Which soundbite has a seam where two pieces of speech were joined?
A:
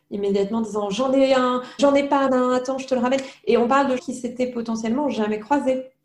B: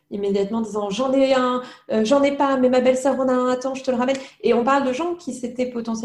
A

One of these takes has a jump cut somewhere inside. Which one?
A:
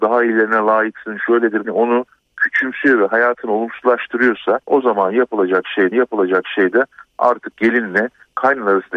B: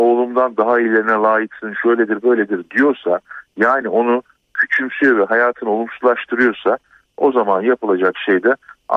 A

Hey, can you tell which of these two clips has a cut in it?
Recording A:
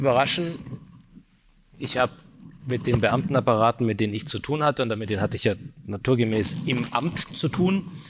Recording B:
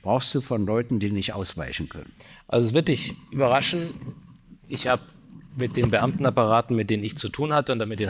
B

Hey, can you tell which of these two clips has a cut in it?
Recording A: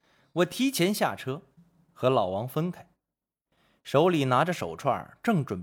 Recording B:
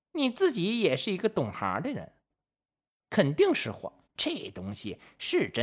B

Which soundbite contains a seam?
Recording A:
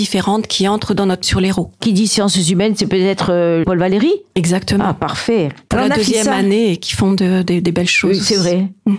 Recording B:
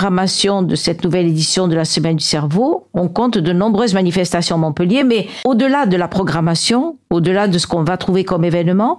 A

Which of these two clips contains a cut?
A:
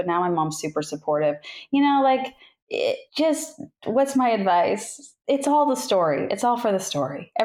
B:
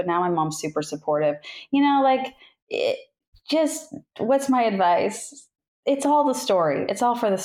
A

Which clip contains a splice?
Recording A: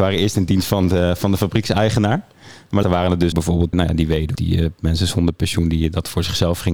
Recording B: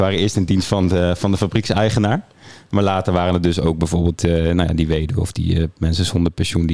A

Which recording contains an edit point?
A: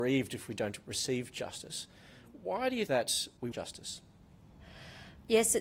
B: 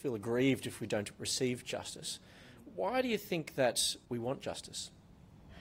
A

